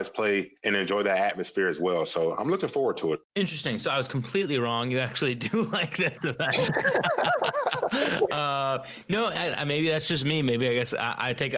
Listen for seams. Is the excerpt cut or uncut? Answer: uncut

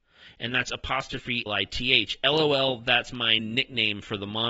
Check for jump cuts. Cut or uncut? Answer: cut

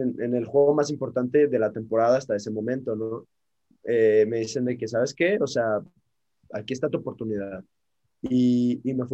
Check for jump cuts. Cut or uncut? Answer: uncut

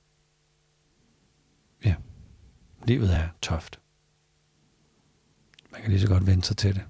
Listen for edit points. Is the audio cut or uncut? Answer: uncut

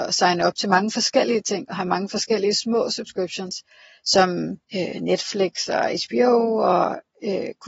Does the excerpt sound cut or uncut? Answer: cut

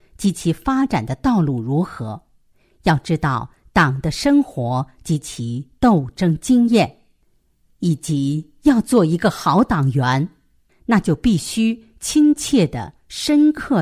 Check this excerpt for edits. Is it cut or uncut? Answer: uncut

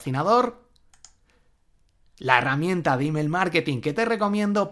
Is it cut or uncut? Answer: uncut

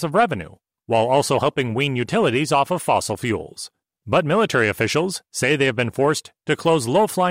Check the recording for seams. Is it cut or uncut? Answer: cut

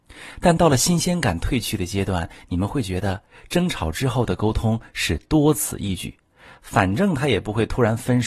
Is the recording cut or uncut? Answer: uncut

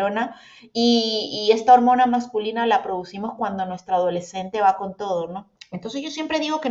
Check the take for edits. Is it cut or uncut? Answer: cut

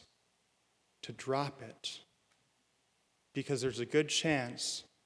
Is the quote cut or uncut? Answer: uncut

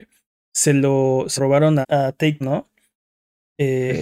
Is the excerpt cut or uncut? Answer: cut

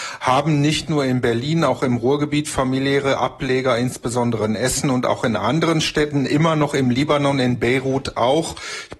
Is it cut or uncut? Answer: uncut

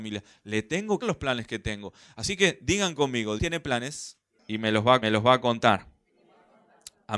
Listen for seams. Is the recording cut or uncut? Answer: cut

